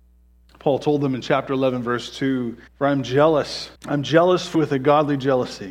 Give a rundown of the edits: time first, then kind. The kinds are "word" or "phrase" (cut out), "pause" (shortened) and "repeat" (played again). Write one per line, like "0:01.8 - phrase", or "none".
0:02.7 - pause
0:03.8 - pause
0:04.5 - word